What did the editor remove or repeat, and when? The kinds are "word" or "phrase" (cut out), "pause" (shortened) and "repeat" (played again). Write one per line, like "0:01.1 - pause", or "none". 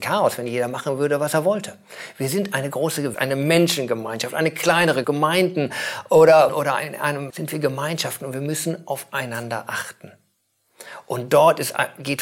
0:03.1 - word
0:05.0 - word
0:06.5 - word
0:07.3 - word